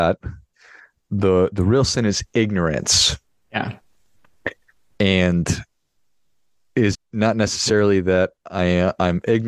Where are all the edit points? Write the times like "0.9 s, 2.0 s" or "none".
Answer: 6.9 s